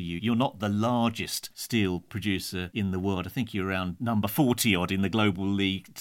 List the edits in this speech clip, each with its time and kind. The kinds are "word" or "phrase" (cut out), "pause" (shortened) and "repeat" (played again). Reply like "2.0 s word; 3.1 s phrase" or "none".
none